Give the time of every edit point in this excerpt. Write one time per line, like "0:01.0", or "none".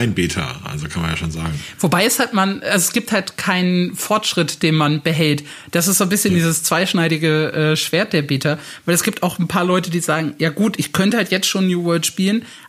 none